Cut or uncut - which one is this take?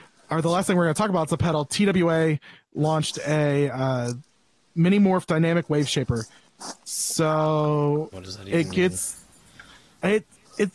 uncut